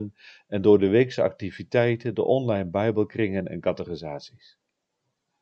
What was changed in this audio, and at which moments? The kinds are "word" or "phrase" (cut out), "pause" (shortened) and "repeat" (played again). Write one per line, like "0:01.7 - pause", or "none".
none